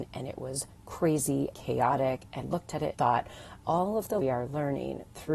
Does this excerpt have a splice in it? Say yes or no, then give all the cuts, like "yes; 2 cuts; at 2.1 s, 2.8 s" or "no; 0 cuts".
yes; 5 cuts; at 1.5 s, 2.4 s, 2.9 s, 3.6 s, 4.2 s